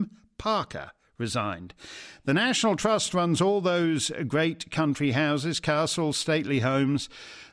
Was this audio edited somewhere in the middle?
no; 0 cuts

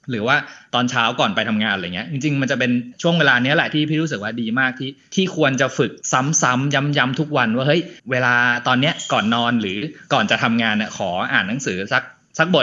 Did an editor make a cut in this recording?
yes; 2 cuts; at 6.0 s, 8.0 s

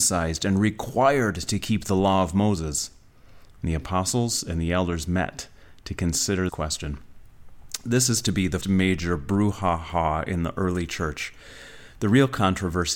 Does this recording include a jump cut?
yes; 2 cuts; at 6.5 s, 8.6 s

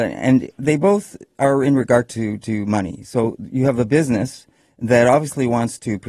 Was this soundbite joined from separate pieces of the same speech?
no; 0 cuts

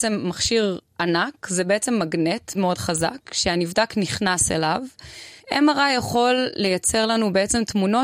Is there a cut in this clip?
yes; 2 cuts; at 2.5 s, 5.4 s

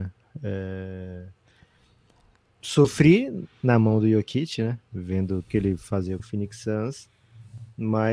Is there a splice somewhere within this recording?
yes; 2 cuts; at 5.5 s, 6.2 s

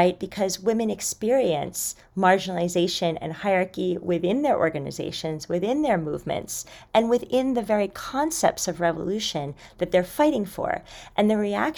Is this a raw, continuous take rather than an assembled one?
yes; 0 cuts

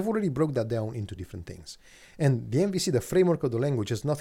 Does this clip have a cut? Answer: yes; 1 cut; at 1.2 s

